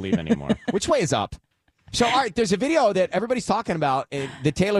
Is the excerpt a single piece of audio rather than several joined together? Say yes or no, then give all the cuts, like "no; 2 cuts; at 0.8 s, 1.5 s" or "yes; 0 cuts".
yes; 0 cuts